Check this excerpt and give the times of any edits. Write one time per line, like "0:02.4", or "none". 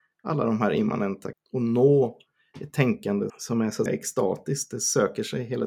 0:01.3
0:03.3
0:03.9

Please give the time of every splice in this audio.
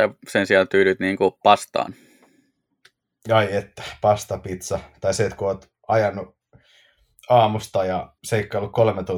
0:08.2

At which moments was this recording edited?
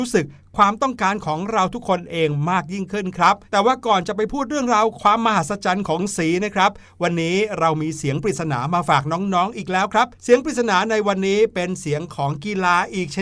0:03.5
0:10.1

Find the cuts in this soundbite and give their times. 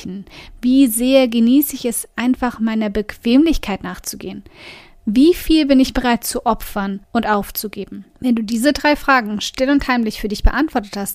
0:07.0
0:08.1

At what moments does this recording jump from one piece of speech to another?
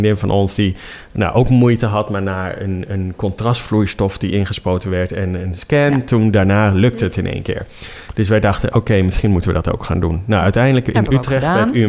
none

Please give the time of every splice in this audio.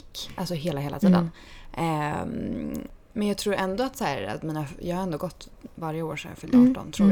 none

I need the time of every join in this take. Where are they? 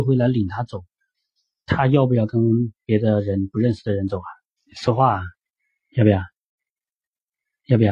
0:04.6

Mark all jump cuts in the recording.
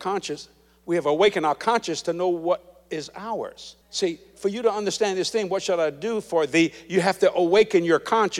0:03.8

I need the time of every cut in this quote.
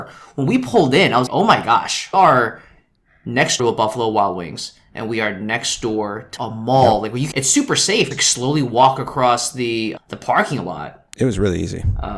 0:01.3
0:02.1
0:03.6
0:06.4
0:07.3
0:08.1
0:10.0

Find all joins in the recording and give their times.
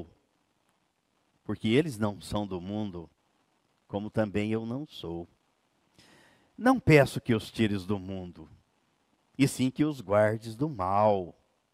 none

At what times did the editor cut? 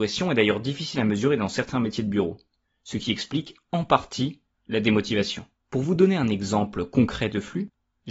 none

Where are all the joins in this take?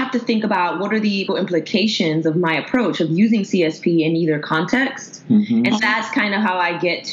0:01.3
0:05.8

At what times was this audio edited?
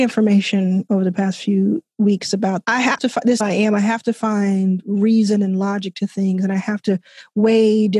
0:02.6
0:03.0
0:03.4

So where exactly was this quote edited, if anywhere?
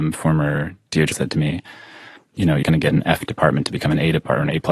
0:01.1
0:02.6

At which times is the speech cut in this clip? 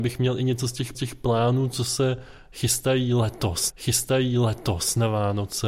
0:00.9
0:03.7

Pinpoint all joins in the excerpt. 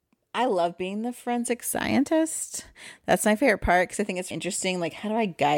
0:04.3

